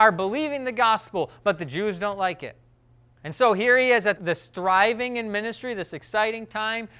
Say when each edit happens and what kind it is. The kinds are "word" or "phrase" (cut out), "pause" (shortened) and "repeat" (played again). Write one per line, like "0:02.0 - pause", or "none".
none